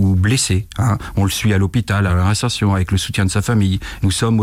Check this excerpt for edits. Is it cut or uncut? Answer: uncut